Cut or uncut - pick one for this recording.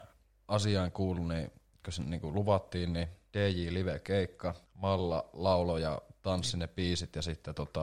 cut